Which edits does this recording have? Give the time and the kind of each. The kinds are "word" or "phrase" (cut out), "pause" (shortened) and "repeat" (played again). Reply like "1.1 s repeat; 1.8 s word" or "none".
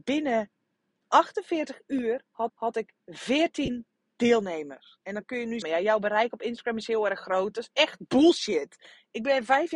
2.5 s repeat; 5.0 s pause; 5.6 s phrase

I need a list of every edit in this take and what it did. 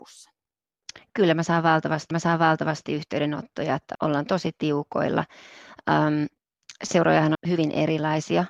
2.1 s repeat; 3.9 s word; 7.3 s word

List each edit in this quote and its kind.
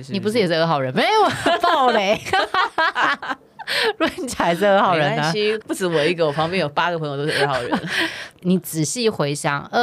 none

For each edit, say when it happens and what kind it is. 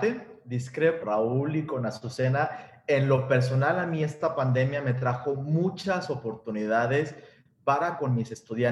1.0 s phrase

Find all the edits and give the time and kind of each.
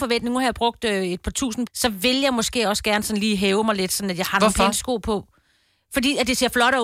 1.7 s phrase

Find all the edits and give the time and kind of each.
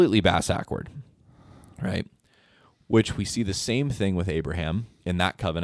none

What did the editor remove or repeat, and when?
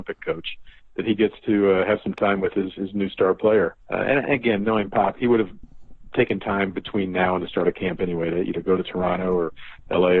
3.8 s pause

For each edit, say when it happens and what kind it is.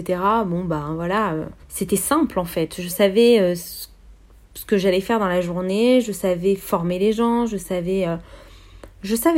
1.6 s pause

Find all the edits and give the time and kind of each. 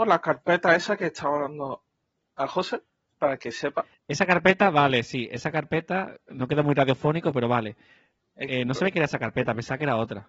none

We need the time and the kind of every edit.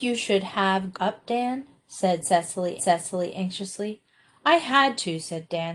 0.9 s word; 2.8 s repeat

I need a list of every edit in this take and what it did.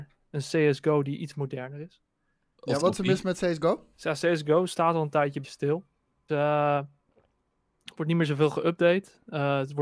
2.8 s word; 3.9 s pause; 5.4 s word; 6.3 s word

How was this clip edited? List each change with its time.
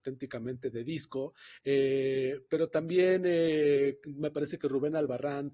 none

